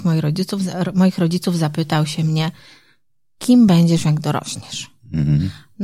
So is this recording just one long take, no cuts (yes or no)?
yes